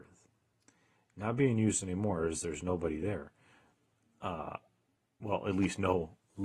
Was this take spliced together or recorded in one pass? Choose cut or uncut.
uncut